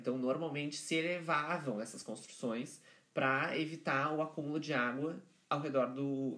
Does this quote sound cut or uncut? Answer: uncut